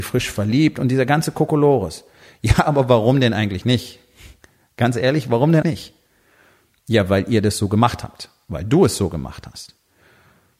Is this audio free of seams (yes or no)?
no